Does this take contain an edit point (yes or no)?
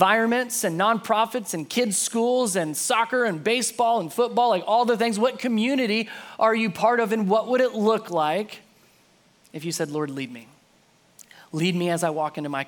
no